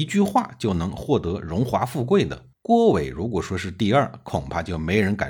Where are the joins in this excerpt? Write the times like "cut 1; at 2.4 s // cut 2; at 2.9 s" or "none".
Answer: cut 1; at 2.5 s